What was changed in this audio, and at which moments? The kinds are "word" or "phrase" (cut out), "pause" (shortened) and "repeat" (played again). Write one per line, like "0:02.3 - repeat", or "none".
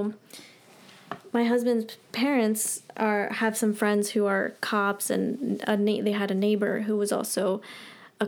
none

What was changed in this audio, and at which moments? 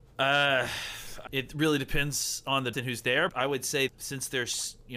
0:01.3 - word
0:02.7 - word
0:03.3 - word
0:03.9 - word

